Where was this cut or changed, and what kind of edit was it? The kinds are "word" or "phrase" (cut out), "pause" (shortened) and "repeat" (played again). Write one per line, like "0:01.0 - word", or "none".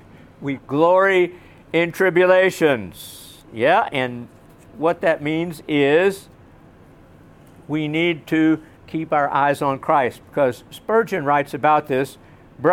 none